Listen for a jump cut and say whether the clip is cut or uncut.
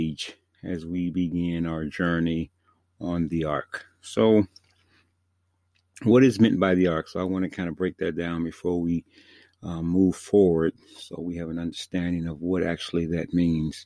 uncut